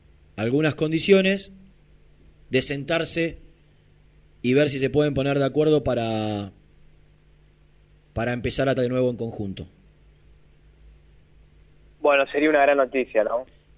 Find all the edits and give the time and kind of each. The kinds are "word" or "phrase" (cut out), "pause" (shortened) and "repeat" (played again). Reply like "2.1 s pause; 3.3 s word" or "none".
8.8 s word